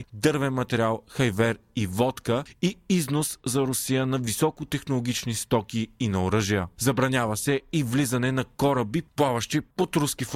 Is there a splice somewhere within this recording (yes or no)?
no